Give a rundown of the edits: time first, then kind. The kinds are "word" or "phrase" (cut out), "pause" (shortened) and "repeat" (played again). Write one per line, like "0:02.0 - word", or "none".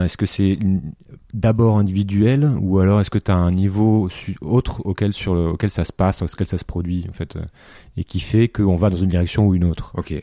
none

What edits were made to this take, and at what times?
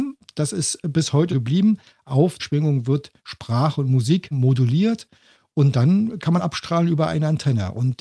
0:01.3 - word
0:02.4 - word
0:04.3 - word
0:06.4 - word

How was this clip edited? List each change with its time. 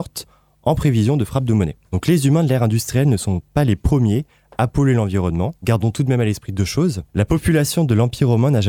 0:01.8 - pause
0:05.6 - pause
0:07.1 - pause

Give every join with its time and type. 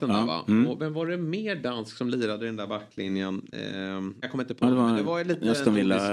0:04.2 - word

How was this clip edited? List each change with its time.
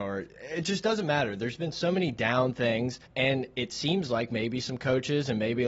0:03.1 - pause

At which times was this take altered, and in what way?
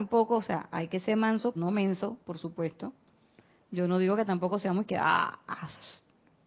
0:01.5 - word

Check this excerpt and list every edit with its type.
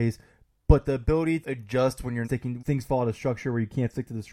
0:01.4 - word
0:02.2 - word
0:02.6 - word

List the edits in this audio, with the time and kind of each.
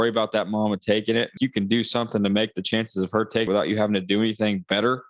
0:01.4 - word
0:03.5 - word

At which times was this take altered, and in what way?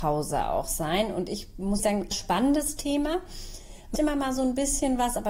0:01.8 - word
0:02.1 - phrase
0:04.0 - word

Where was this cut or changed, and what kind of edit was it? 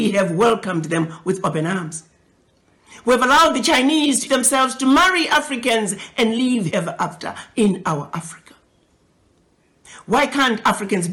0:04.3 - word
0:06.7 - word

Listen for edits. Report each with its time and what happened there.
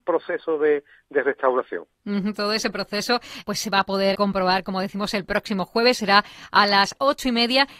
0:02.3 - word
0:03.4 - word
0:04.1 - word

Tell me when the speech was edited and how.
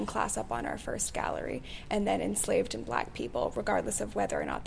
none

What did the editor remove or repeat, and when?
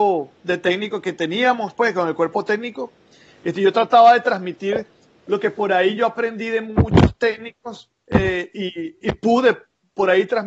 none

